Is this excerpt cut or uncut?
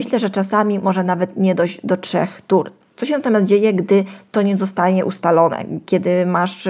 uncut